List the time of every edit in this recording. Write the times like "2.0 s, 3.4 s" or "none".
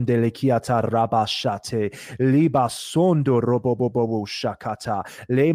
none